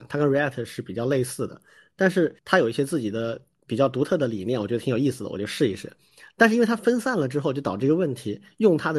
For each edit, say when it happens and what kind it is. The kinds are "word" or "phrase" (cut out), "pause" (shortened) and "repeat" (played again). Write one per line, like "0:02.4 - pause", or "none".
0:02.4 - pause